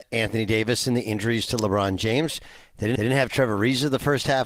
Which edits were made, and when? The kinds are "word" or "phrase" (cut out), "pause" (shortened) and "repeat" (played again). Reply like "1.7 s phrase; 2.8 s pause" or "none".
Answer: 2.9 s repeat

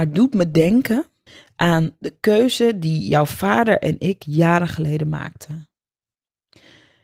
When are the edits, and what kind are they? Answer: 1.3 s pause

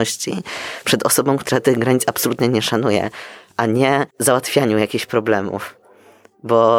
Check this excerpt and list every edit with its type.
4.1 s pause

